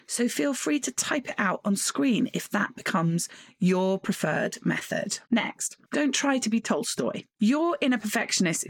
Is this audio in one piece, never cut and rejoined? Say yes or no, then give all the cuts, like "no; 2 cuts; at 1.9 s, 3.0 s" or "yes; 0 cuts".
no; 1 cut; at 5.2 s